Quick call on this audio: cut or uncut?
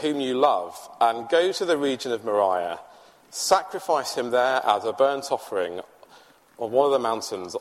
uncut